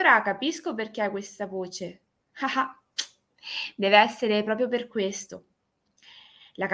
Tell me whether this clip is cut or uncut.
uncut